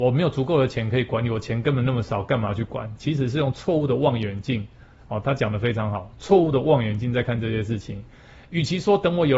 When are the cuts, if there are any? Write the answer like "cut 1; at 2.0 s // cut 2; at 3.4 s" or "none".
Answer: none